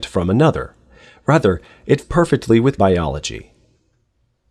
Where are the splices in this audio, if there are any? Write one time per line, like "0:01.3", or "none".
0:02.0
0:02.8